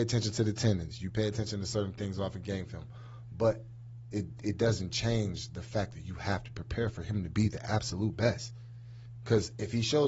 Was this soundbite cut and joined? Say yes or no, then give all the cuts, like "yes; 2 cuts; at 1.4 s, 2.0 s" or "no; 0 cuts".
no; 0 cuts